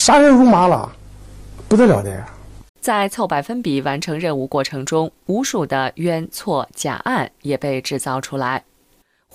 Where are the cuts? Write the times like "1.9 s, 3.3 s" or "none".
2.7 s

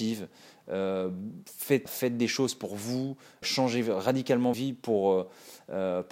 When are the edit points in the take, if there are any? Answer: 1.9 s, 3.4 s, 4.5 s

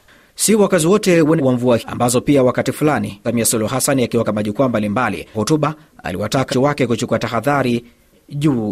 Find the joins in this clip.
1.4 s, 1.8 s, 3.2 s, 4.2 s, 5.3 s, 6.5 s

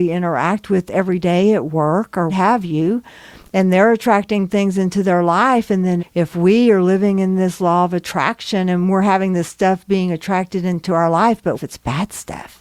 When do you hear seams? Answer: 2.3 s, 6.0 s, 11.5 s

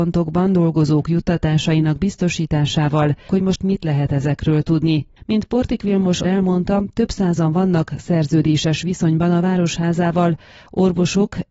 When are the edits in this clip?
3.3 s, 6.2 s

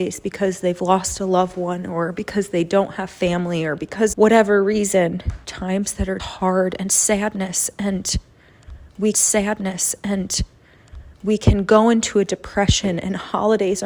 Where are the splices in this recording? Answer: 4.1 s, 5.4 s, 6.2 s, 9.1 s

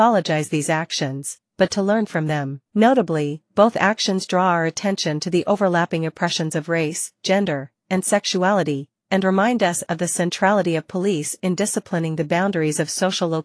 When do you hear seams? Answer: 2.7 s

